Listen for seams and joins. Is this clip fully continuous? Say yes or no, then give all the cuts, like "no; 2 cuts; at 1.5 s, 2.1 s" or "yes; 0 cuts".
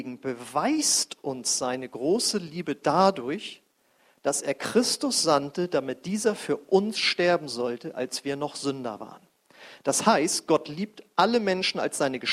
yes; 0 cuts